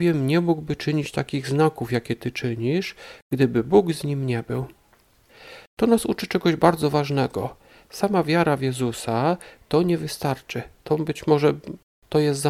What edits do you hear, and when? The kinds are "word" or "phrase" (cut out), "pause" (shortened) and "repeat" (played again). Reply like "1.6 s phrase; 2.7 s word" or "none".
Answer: none